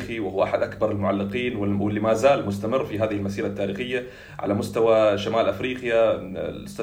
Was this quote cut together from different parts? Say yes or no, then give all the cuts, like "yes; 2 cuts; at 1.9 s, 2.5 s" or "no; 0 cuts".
no; 0 cuts